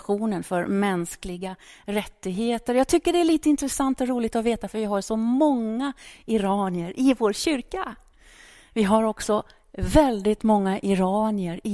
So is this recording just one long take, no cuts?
yes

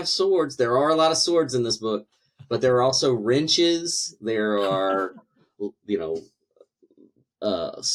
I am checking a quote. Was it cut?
no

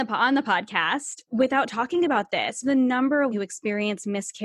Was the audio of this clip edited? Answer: yes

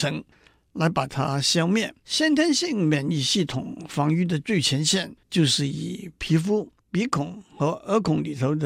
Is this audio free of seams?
no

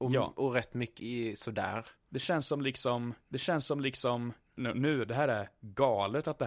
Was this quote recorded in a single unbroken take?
no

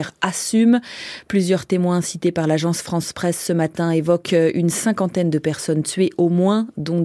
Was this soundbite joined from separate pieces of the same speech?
no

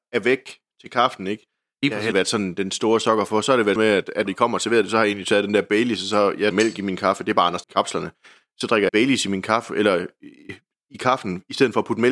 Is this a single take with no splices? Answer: no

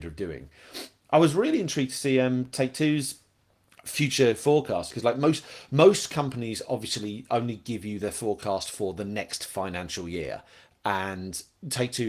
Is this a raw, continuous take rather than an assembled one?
yes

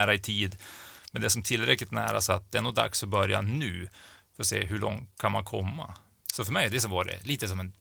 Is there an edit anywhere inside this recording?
no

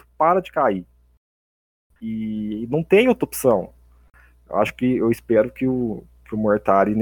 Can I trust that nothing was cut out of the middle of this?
yes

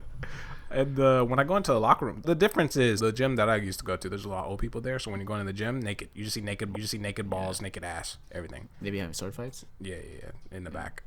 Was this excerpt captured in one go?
no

